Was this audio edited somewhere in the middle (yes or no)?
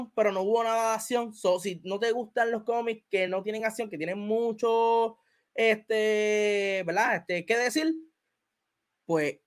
no